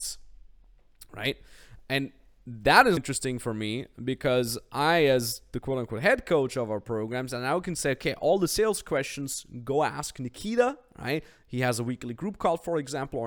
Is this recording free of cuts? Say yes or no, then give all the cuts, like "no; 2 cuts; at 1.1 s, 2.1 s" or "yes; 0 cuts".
no; 1 cut; at 3.0 s